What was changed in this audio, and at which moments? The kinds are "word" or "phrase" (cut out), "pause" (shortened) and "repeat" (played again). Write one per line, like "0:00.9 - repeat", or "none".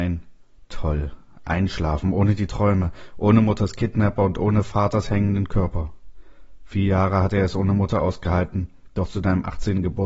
none